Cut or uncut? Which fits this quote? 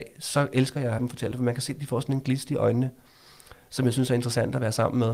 cut